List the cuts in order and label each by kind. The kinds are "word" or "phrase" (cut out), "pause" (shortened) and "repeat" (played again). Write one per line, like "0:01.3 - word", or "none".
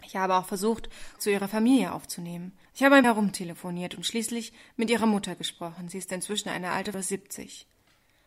0:01.2 - word
0:02.7 - pause
0:03.0 - word
0:06.9 - phrase